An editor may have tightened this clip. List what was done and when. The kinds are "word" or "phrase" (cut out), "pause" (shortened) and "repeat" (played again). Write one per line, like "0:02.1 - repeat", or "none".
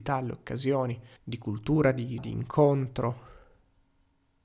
0:01.2 - pause
0:02.2 - word